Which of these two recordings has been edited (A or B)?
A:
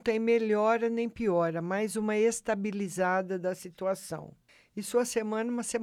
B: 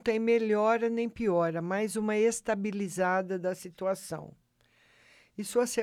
A